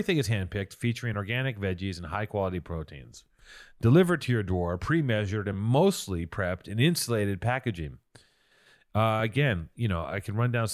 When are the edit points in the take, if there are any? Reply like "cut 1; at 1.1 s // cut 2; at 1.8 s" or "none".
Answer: none